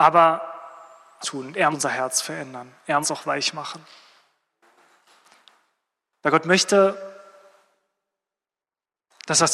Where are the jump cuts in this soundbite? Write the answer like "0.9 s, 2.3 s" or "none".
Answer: 1.2 s, 1.7 s, 3.0 s